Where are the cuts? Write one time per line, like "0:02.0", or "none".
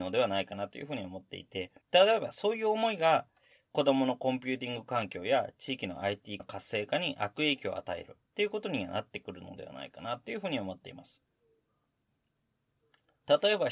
0:01.8
0:06.4